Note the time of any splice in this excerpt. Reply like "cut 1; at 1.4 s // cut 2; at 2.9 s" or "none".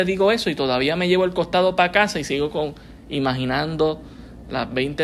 none